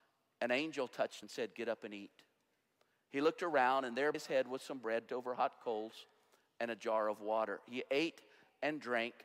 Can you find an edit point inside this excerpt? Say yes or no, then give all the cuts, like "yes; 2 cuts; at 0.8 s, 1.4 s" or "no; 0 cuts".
yes; 3 cuts; at 1.2 s, 4.1 s, 5.1 s